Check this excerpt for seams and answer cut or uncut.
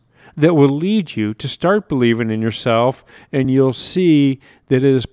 uncut